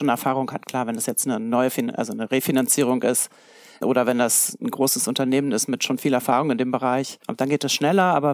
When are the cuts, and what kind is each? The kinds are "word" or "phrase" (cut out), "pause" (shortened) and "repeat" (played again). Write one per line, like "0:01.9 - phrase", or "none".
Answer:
none